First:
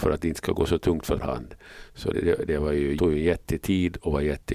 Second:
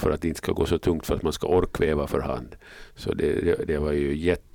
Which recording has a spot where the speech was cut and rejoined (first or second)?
first